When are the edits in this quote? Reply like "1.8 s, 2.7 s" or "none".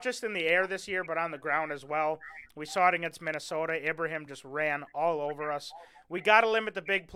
none